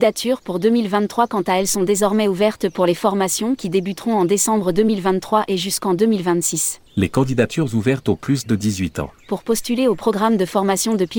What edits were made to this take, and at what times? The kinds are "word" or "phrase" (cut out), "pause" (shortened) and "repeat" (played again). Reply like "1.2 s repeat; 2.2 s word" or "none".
6.9 s pause; 9.2 s pause